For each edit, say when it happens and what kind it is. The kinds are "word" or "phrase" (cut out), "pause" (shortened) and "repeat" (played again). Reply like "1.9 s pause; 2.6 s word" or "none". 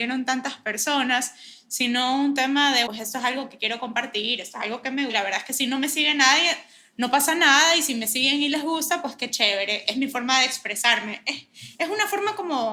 2.9 s word; 5.1 s word; 9.9 s word